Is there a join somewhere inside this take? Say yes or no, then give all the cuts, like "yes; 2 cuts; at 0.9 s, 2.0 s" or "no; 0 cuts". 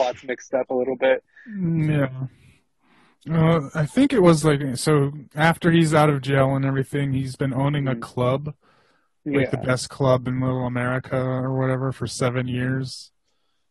no; 0 cuts